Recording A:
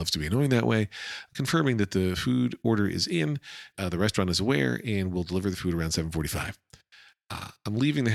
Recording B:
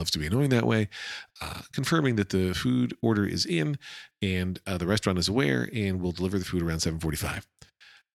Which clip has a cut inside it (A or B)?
A